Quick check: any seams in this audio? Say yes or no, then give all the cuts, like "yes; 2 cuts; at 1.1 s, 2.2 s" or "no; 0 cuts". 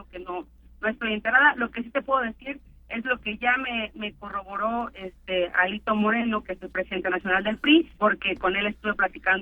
yes; 1 cut; at 7.9 s